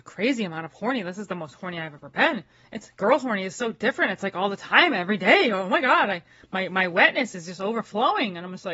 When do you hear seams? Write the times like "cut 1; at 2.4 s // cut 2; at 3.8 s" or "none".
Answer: none